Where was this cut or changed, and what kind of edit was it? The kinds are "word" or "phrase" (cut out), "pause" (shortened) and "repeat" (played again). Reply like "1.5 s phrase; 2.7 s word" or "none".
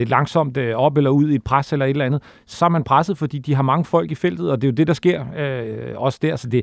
2.5 s word